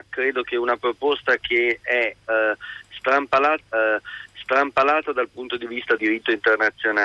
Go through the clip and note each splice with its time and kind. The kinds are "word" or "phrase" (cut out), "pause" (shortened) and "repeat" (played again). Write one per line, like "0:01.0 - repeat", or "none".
0:03.6 - repeat
0:06.0 - word

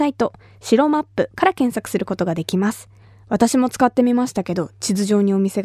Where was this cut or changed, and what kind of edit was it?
0:03.0 - pause

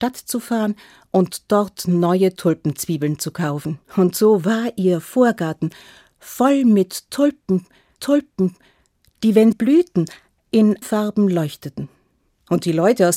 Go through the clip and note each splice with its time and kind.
0:03.8 - pause
0:08.0 - repeat
0:09.5 - word
0:10.8 - word
0:12.2 - pause

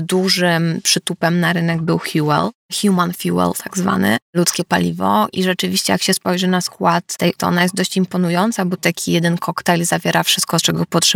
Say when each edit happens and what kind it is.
0:05.3 - word
0:07.4 - word

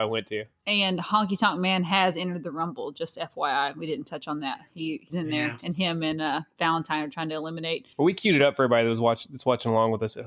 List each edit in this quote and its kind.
0:05.1 - word
0:07.9 - pause

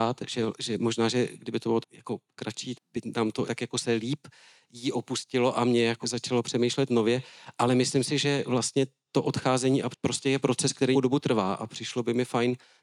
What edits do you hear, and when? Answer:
0:01.8 - word
0:02.7 - word
0:03.5 - word
0:06.0 - word
0:09.9 - word
0:10.9 - word

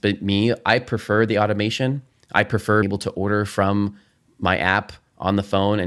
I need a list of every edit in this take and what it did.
0:02.8 - word

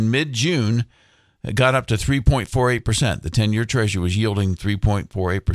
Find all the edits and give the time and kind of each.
none

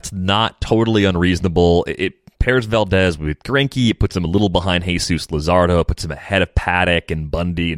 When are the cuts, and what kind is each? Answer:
none

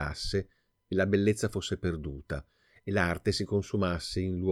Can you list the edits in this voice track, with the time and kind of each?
none

